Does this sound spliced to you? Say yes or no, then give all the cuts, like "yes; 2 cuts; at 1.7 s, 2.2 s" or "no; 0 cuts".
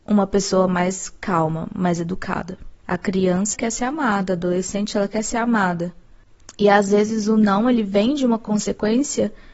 yes; 2 cuts; at 2.8 s, 3.5 s